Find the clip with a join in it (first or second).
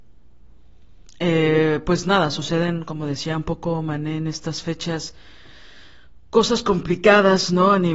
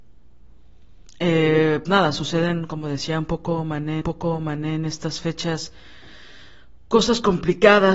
second